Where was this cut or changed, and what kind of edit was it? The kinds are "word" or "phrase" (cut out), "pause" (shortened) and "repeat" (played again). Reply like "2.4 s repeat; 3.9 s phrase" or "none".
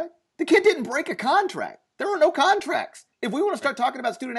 3.1 s pause